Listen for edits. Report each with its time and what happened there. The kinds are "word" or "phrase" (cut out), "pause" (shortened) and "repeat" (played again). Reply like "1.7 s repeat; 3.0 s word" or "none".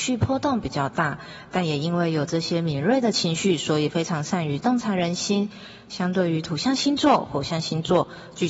none